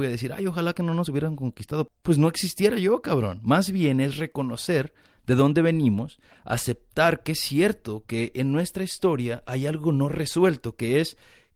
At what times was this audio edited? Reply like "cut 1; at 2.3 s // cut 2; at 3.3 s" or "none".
none